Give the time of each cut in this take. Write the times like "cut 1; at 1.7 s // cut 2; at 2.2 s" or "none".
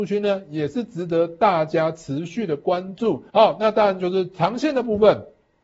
cut 1; at 3.3 s